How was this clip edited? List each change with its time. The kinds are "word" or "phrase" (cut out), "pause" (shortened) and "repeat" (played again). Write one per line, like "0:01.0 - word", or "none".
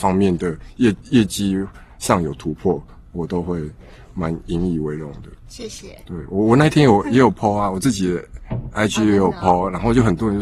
none